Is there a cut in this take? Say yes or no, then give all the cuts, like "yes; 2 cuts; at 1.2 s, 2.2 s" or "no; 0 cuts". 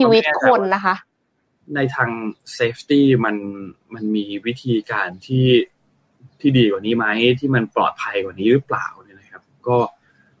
no; 0 cuts